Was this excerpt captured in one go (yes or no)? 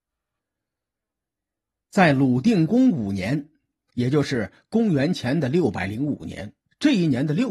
yes